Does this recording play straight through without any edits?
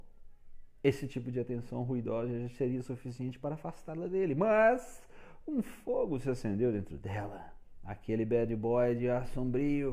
yes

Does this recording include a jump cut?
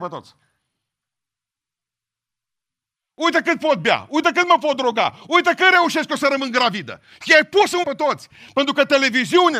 yes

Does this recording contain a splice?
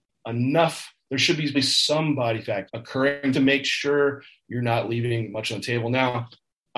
yes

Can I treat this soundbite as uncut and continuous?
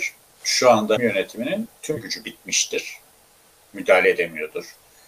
no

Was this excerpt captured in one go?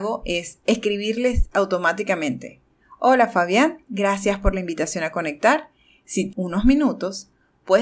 no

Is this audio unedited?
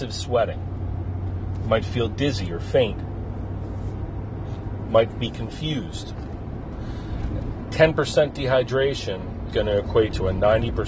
no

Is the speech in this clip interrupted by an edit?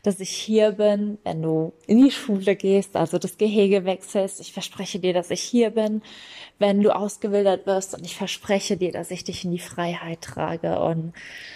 no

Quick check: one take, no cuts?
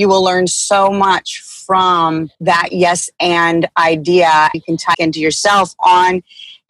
no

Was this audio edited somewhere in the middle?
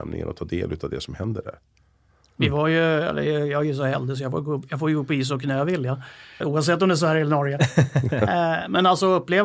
yes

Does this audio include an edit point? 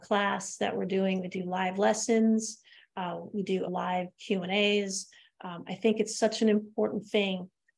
yes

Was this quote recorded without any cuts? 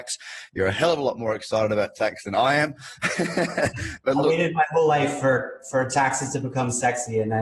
yes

